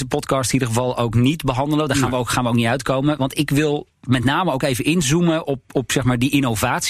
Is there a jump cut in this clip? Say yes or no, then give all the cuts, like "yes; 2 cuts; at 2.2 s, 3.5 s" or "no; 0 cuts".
no; 0 cuts